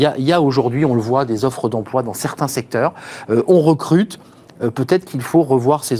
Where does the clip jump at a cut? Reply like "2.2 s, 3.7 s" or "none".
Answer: none